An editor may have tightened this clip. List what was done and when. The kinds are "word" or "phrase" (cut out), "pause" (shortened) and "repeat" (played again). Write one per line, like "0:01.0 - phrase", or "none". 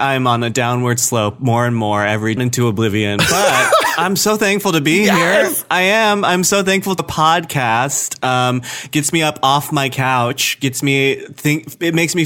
0:02.4 - phrase
0:07.0 - word